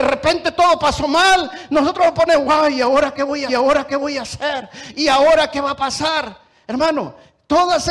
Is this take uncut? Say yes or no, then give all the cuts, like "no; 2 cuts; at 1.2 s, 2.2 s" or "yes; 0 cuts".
no; 1 cut; at 3.5 s